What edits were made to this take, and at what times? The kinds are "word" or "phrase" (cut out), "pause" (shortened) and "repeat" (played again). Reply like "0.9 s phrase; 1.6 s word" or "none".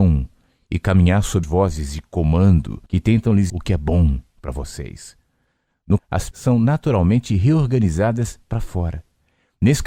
1.4 s word; 2.9 s pause; 3.5 s word; 6.0 s phrase; 6.3 s word; 8.4 s phrase